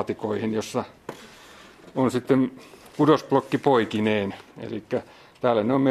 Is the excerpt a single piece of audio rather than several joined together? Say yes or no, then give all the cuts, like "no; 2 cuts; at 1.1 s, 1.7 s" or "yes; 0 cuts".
yes; 0 cuts